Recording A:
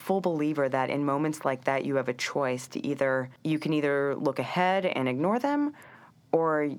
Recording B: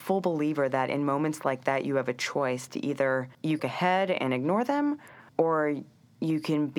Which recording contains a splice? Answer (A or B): B